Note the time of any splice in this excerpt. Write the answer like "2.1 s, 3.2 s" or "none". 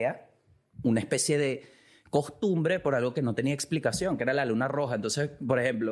none